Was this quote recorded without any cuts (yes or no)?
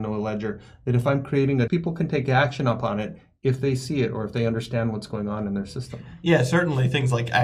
no